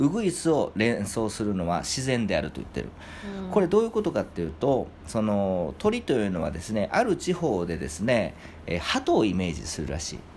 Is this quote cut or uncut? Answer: uncut